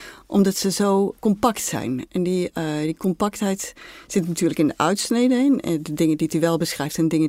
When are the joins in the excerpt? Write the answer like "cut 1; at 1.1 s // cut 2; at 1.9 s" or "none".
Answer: cut 1; at 1.2 s